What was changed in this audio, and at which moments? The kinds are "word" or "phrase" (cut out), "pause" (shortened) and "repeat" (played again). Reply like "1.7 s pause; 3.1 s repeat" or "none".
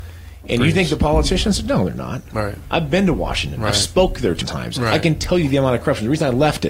4.4 s word